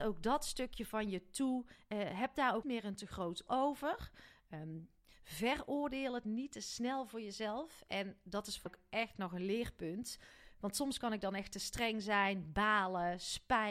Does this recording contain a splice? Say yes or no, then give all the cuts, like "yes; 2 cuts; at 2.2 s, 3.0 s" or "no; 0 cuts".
yes; 3 cuts; at 2.6 s, 3.5 s, 8.7 s